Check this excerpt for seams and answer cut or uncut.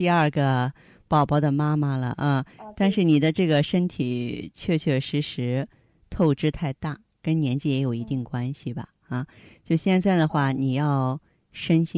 uncut